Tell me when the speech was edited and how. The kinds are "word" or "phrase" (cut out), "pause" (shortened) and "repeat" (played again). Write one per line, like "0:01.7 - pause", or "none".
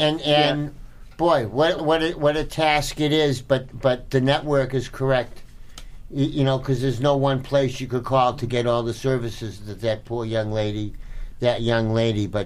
0:01.8 - word